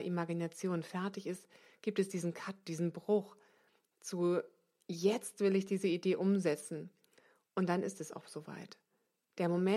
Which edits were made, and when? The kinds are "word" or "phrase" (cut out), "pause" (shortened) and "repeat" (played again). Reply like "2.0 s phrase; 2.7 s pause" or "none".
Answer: none